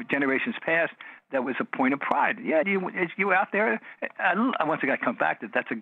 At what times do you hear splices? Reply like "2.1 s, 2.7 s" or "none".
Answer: 2.6 s